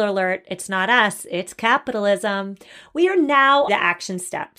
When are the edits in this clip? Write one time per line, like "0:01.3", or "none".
0:03.7